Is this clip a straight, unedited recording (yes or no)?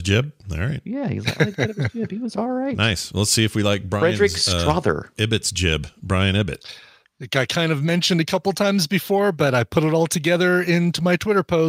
yes